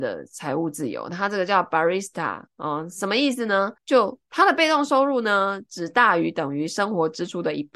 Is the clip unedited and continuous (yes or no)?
no